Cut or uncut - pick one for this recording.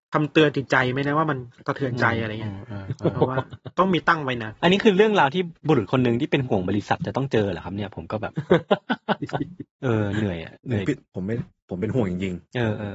cut